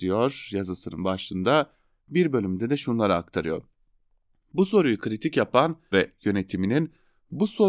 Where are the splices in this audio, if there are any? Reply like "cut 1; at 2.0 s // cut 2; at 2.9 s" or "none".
cut 1; at 5.9 s